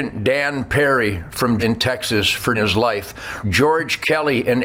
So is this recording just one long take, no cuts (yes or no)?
no